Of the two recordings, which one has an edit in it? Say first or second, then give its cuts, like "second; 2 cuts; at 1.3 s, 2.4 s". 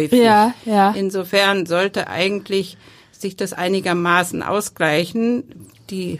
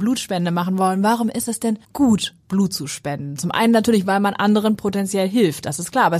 second; 1 cut; at 1.8 s